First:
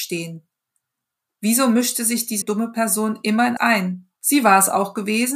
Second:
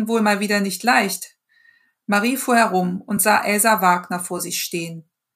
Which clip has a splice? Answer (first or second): first